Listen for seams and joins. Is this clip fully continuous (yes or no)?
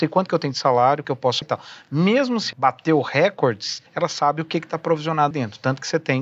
no